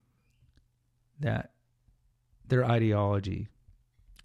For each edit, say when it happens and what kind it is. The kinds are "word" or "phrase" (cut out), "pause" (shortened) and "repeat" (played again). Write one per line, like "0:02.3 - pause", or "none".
none